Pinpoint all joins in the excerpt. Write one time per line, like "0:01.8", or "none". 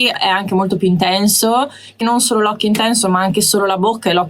0:02.0